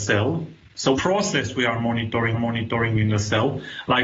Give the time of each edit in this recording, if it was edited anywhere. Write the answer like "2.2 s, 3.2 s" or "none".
1.0 s, 2.3 s